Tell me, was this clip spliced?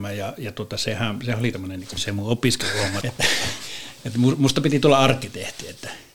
yes; 4 cuts; at 1.2 s, 1.5 s, 2.0 s, 3.0 s

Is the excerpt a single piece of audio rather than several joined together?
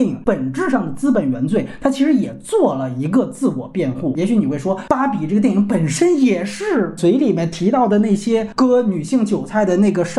no; 1 cut; at 7.0 s

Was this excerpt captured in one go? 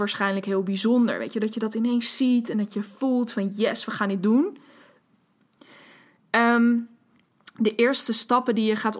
yes; 0 cuts

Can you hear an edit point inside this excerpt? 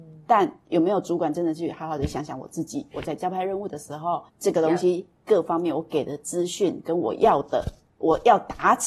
yes; 1 cut; at 4.3 s

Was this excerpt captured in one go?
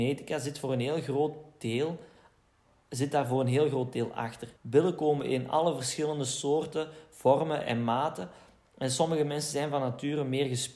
no; 1 cut; at 4.6 s

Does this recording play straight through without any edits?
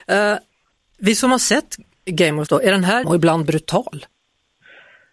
no; 2 cuts; at 2.5 s, 3.0 s

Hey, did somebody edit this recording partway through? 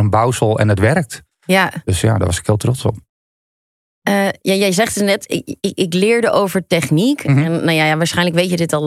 no; 0 cuts

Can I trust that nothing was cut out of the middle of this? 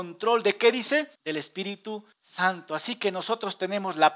no; 2 cuts; at 1.2 s, 2.1 s

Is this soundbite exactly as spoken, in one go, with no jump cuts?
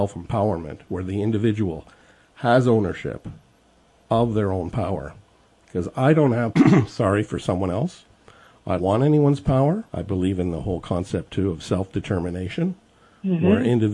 no; 3 cuts; at 6.5 s, 8.8 s, 9.9 s

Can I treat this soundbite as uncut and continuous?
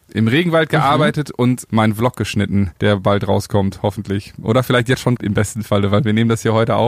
no; 3 cuts; at 1.7 s, 2.8 s, 5.2 s

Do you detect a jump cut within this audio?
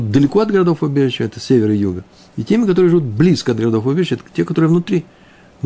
no; 0 cuts

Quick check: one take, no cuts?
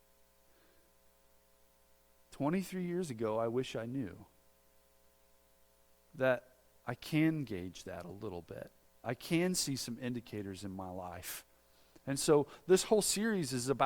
no; 1 cut; at 8.9 s

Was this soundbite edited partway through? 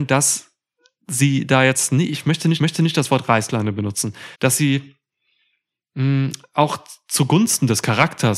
yes; 2 cuts; at 2.6 s, 4.3 s

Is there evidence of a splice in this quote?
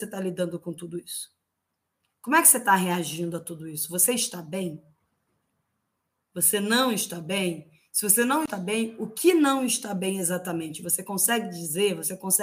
no; 0 cuts

